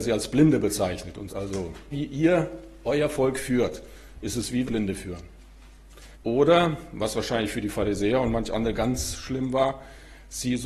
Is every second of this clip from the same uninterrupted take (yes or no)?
no